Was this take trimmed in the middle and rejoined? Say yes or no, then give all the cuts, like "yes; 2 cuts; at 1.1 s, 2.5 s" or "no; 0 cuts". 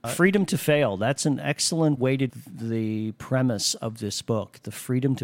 yes; 2 cuts; at 2.0 s, 2.3 s